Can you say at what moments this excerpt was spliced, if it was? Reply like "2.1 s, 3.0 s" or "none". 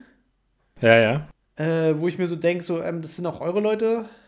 none